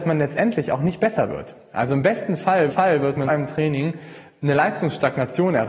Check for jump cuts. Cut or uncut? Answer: cut